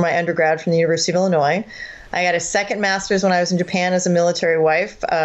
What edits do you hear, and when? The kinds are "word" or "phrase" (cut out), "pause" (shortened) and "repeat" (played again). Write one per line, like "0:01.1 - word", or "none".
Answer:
none